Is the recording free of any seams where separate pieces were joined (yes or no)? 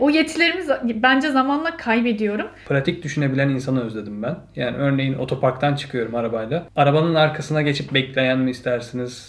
yes